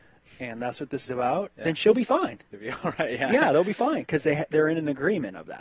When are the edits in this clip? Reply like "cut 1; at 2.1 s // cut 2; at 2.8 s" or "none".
cut 1; at 1.1 s